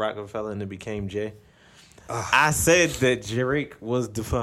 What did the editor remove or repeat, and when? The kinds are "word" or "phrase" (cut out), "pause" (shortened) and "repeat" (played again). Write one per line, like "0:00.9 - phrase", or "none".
none